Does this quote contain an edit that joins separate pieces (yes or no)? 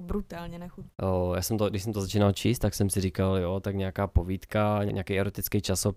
no